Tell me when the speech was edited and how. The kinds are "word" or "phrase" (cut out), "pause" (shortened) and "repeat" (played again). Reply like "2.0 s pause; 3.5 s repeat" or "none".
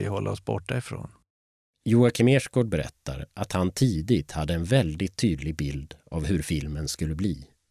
none

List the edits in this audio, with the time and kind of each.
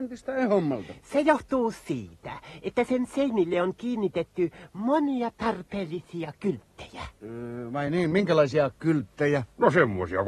none

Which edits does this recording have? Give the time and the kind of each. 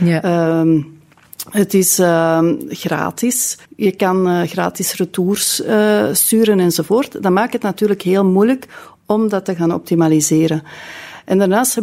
3.6 s pause

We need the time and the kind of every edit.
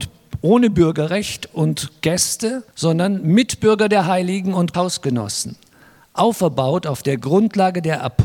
2.7 s pause; 4.7 s word

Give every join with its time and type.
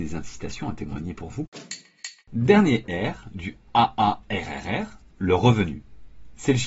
2.2 s pause

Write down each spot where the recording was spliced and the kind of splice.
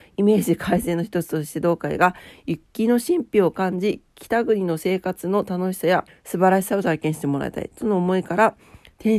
6.1 s pause

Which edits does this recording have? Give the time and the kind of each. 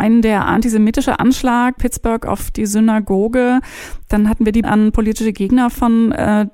1.8 s word; 4.6 s word

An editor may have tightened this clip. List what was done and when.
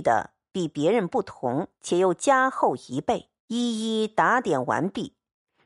1.8 s pause; 3.4 s pause

